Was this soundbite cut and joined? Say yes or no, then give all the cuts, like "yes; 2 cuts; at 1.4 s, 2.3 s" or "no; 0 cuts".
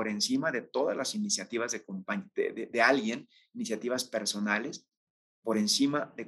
no; 0 cuts